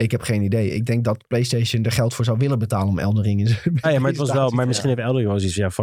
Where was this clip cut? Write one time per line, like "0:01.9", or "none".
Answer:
0:03.8

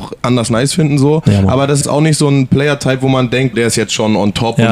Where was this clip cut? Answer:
0:01.8
0:03.5

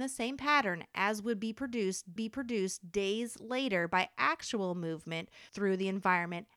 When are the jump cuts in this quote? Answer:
0:02.2
0:05.5

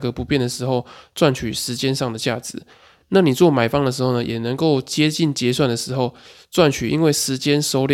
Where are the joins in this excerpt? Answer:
none

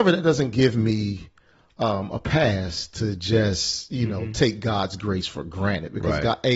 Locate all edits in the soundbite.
none

